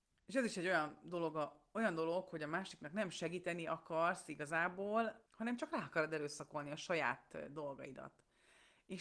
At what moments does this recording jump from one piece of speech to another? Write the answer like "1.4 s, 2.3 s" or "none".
5.3 s